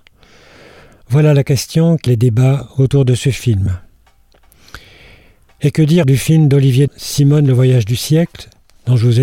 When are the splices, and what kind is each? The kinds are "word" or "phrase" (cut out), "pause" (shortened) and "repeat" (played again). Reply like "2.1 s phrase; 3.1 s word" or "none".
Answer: 2.1 s word; 6.0 s word; 6.9 s word